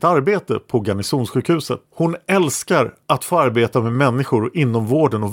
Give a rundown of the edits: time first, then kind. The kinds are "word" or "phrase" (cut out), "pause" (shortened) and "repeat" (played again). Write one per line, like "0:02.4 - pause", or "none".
0:01.9 - pause
0:03.0 - pause